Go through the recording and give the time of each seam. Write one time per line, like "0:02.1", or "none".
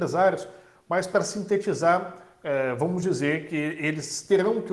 none